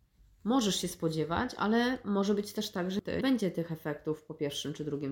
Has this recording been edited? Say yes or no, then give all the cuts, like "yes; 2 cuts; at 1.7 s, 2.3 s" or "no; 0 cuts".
yes; 1 cut; at 3.2 s